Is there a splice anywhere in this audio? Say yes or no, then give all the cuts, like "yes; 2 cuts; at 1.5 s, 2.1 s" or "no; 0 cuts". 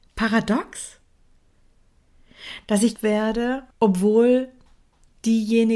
yes; 2 cuts; at 3.0 s, 3.7 s